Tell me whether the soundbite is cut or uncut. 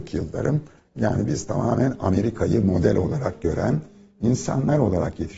uncut